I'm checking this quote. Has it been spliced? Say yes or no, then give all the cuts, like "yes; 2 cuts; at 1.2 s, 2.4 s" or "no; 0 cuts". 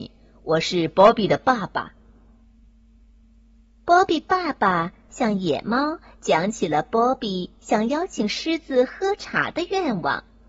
no; 0 cuts